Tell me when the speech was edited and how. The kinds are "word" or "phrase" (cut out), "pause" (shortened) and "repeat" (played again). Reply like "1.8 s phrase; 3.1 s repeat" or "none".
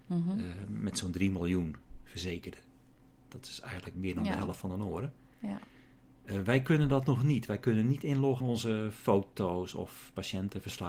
3.9 s word; 8.4 s word